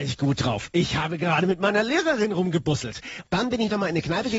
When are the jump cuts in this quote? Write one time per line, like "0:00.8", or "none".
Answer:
0:03.2